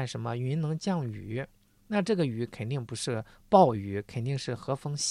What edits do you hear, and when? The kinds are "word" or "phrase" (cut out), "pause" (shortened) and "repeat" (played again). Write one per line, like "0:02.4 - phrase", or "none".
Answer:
none